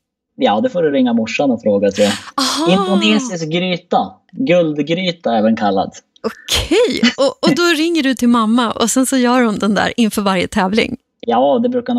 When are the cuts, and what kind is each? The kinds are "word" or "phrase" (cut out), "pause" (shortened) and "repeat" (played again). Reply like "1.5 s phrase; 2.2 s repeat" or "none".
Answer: none